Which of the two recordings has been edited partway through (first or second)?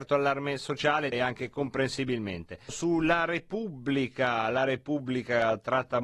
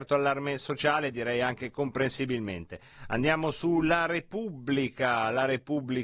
first